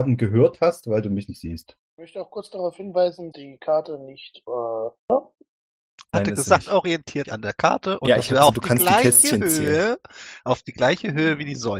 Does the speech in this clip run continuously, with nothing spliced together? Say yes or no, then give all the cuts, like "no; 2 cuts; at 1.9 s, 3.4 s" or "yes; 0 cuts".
no; 6 cuts; at 1.8 s, 3.3 s, 4.5 s, 5.0 s, 6.1 s, 7.2 s